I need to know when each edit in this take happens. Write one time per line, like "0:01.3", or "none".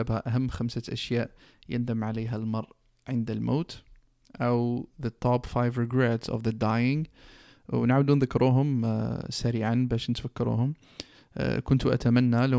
none

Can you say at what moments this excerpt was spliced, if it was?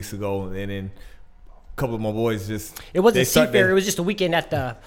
none

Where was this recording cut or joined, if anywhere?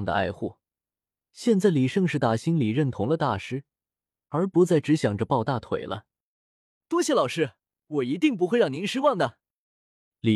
none

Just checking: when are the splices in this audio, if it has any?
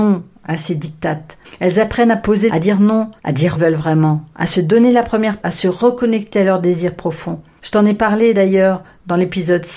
0:01.4
0:02.5
0:03.2
0:03.6
0:05.4

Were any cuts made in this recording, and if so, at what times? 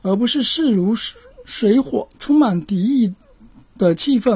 0:02.1

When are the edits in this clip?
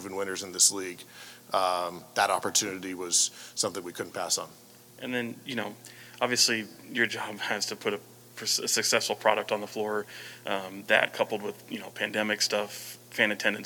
none

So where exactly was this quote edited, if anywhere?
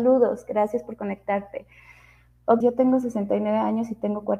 0:02.6

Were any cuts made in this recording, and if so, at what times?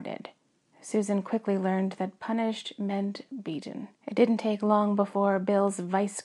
0:04.0

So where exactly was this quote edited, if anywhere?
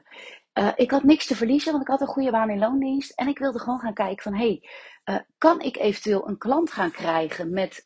none

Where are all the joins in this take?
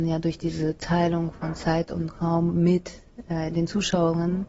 none

